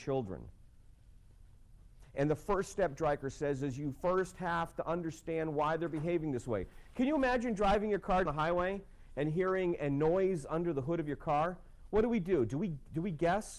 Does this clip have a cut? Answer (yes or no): yes